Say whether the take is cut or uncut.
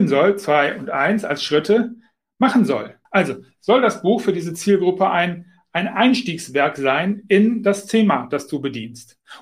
cut